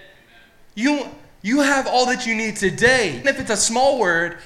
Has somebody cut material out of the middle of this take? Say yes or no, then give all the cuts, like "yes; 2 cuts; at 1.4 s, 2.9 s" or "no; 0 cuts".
yes; 1 cut; at 3.2 s